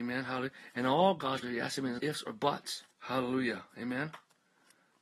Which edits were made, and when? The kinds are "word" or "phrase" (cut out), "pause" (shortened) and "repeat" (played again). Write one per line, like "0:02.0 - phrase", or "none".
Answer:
0:01.4 - word
0:02.0 - word
0:02.9 - pause